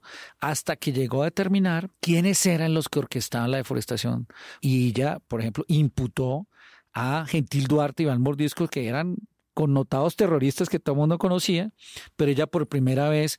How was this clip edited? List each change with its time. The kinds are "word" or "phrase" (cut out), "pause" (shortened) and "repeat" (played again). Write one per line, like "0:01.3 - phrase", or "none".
0:01.9 - pause

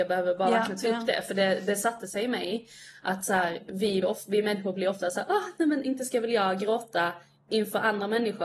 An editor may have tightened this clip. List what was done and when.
0:04.0 - word

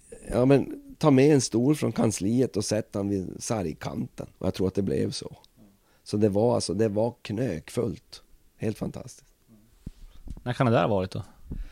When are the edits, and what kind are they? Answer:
0:04.3 - pause

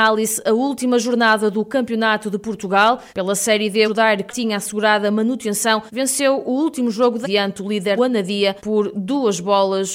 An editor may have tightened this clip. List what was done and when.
0:03.1 - pause
0:03.8 - phrase
0:04.3 - word
0:05.9 - pause
0:07.2 - word
0:08.0 - phrase
0:08.6 - pause

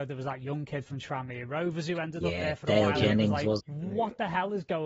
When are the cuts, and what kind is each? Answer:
0:03.6 - word

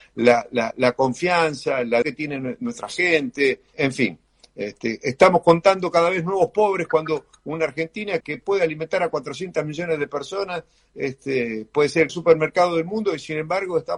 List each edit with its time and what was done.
0:02.0 - word
0:03.7 - word
0:08.2 - word
0:12.1 - word

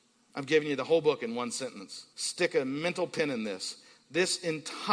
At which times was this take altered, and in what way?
0:02.1 - pause

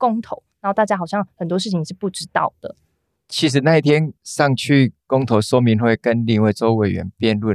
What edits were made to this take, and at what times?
0:04.2 - pause

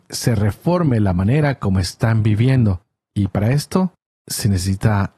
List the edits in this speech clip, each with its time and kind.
none

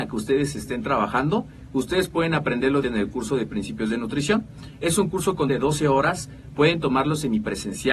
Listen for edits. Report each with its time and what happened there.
0:02.8 - word
0:05.5 - word

